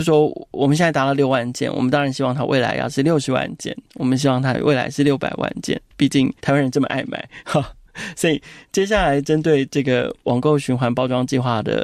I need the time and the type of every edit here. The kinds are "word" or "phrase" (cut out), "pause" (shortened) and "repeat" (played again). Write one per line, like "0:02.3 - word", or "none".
0:06.4 - pause

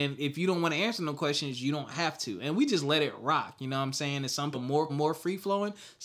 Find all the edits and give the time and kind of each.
0:04.5 - word
0:04.9 - word

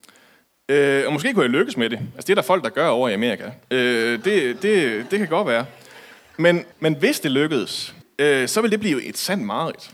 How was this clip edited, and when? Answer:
0:03.6 - pause
0:06.7 - pause
0:08.0 - pause

